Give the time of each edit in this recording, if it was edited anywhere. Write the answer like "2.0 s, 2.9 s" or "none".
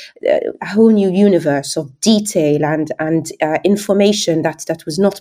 none